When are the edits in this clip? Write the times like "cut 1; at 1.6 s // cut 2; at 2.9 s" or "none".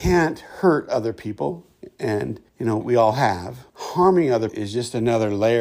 cut 1; at 2.5 s // cut 2; at 2.8 s // cut 3; at 3.7 s // cut 4; at 4.5 s

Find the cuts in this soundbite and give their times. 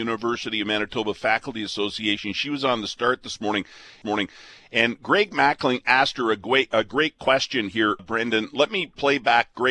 cut 1; at 4.0 s // cut 2; at 8.0 s

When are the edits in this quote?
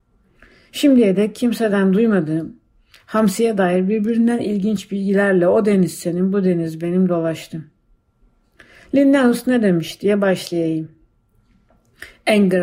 none

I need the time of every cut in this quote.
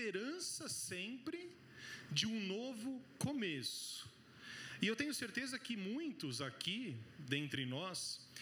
none

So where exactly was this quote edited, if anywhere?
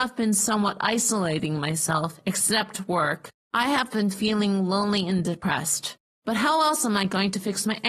none

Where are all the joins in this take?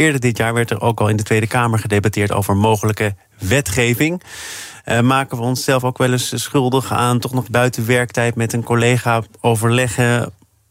cut 1; at 7.5 s

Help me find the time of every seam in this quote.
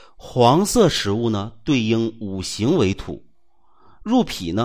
none

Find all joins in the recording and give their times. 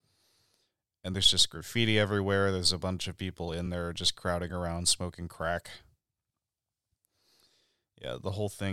none

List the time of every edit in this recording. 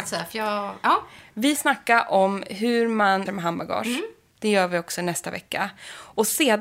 cut 1; at 1.6 s // cut 2; at 3.3 s

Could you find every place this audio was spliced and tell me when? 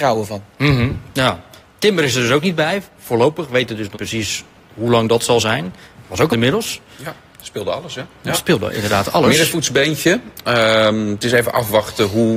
cut 1; at 3.9 s // cut 2; at 6.3 s

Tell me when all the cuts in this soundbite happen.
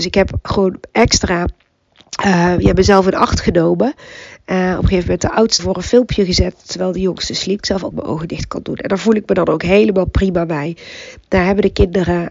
cut 1; at 5.6 s // cut 2; at 7.6 s // cut 3; at 7.9 s

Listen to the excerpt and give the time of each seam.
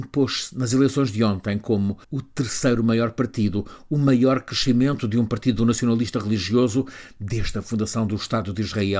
cut 1; at 2.0 s

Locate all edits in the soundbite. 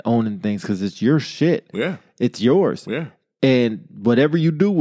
none

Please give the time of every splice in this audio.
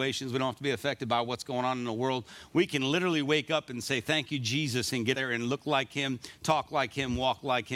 cut 1; at 5.1 s

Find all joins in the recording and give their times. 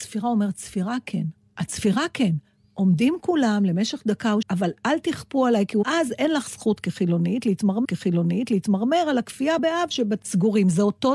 cut 1; at 1.4 s // cut 2; at 4.4 s // cut 3; at 5.8 s // cut 4; at 7.8 s // cut 5; at 9.6 s // cut 6; at 10.2 s

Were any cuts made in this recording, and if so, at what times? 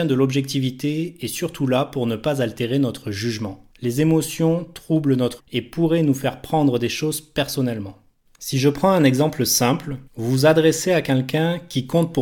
cut 1; at 3.7 s // cut 2; at 5.4 s // cut 3; at 8.3 s // cut 4; at 10.1 s

